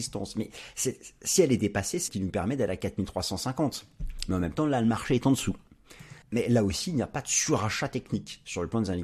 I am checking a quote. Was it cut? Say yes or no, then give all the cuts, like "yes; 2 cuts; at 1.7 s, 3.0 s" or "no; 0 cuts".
yes; 2 cuts; at 2.1 s, 6.2 s